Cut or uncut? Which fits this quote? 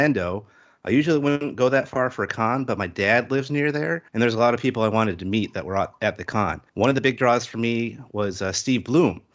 cut